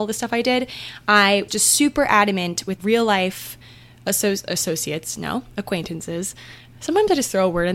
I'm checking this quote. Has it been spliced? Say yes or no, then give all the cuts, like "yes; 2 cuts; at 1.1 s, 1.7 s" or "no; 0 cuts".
yes; 2 cuts; at 1.5 s, 2.8 s